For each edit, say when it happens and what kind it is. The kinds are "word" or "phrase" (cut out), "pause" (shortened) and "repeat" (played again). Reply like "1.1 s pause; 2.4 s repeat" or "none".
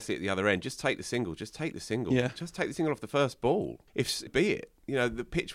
3.9 s pause; 4.3 s word